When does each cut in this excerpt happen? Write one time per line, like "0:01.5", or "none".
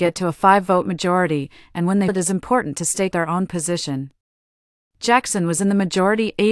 0:02.1
0:03.1

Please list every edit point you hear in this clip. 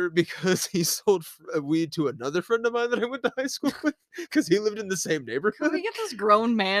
none

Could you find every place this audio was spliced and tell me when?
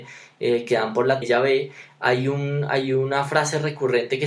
0:01.2

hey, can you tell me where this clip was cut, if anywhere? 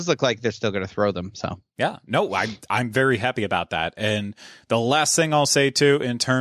none

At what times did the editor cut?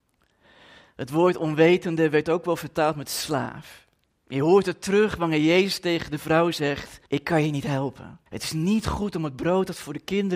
0:07.1
0:08.3

